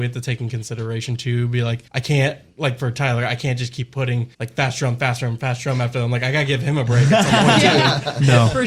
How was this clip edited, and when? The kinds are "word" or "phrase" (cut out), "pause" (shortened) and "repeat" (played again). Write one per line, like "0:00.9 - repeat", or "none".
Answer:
0:01.9 - pause
0:04.3 - pause